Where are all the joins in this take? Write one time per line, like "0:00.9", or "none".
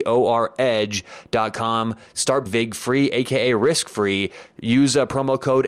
0:02.5